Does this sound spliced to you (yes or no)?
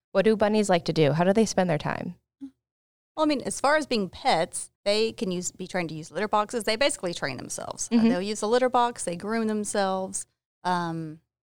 yes